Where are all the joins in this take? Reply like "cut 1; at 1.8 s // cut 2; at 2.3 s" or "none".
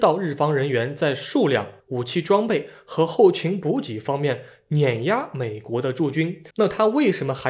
cut 1; at 1.8 s // cut 2; at 6.5 s